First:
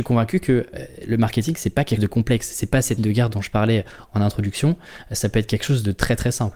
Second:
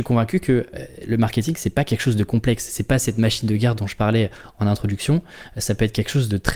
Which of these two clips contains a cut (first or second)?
first